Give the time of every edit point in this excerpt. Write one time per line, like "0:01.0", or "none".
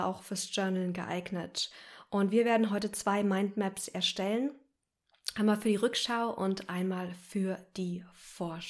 none